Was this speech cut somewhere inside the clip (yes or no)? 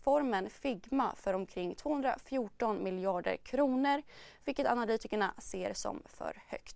no